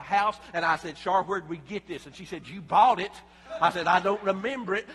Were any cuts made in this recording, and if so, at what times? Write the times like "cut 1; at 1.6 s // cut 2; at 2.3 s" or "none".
none